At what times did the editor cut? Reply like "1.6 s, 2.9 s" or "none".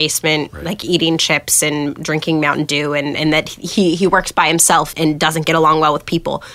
4.9 s